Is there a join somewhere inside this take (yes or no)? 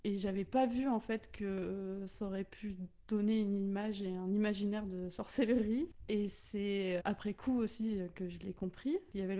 yes